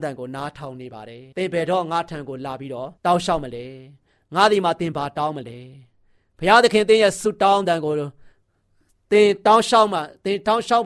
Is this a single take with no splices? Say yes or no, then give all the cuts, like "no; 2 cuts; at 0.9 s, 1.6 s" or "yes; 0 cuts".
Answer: no; 2 cuts; at 1.3 s, 3.0 s